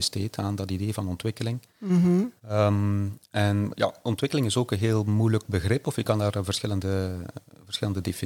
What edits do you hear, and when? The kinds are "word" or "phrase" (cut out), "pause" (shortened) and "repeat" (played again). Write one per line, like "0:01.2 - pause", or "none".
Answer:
0:02.4 - pause